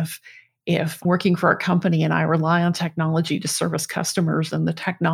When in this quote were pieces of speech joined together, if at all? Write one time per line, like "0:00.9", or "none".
0:01.0